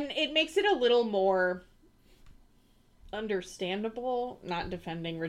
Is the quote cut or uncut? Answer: uncut